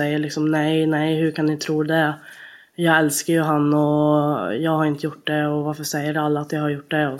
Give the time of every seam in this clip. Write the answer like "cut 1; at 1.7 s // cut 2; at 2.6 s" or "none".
none